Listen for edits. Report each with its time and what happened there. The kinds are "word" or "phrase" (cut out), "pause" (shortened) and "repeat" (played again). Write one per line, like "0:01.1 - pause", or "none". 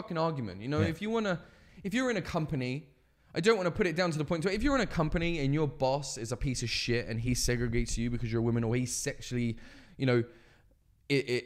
none